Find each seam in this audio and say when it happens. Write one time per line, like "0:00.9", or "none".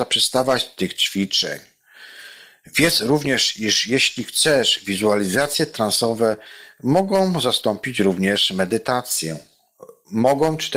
none